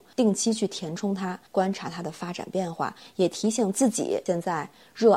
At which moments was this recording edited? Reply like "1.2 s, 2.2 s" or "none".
1.5 s